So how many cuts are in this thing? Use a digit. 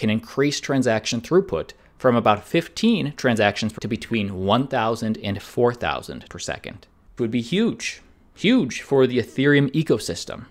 3